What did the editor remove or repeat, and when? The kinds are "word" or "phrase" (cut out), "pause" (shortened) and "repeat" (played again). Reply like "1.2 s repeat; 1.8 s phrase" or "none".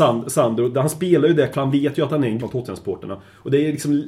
1.5 s word; 2.4 s word